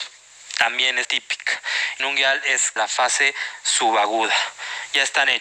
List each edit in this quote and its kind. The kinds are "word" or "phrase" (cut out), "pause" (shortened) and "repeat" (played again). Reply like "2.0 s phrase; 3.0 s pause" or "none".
1.0 s word; 2.0 s phrase; 2.8 s phrase